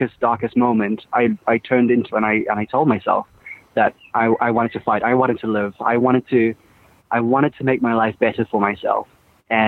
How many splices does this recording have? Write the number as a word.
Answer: one